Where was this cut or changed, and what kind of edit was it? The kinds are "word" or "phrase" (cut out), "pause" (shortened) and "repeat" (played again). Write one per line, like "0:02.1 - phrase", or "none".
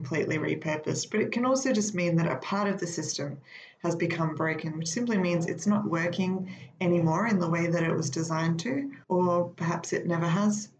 0:09.0 - pause